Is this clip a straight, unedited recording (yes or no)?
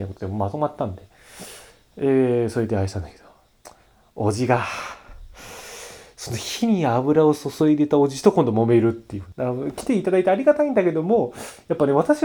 yes